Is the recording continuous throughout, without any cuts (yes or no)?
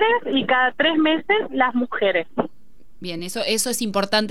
yes